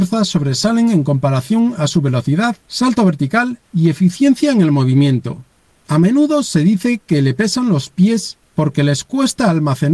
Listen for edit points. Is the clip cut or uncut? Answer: cut